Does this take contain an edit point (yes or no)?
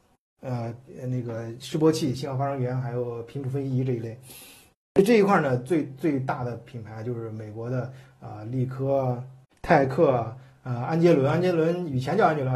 yes